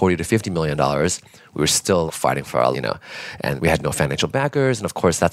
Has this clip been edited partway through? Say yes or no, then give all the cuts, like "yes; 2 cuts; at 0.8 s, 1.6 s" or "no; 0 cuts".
yes; 3 cuts; at 2.1 s, 2.7 s, 3.6 s